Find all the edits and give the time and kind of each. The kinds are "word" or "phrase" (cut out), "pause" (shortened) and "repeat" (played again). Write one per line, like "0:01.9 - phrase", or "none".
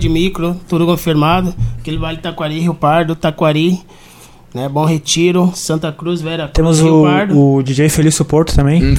none